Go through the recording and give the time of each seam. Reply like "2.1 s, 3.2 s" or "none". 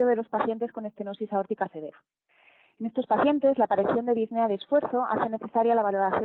none